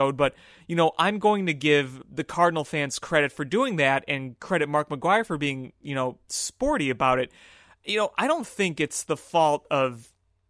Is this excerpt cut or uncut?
uncut